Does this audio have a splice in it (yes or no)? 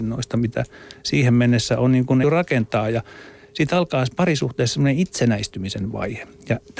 yes